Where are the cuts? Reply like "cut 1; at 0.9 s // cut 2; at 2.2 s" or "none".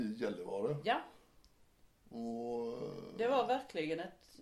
none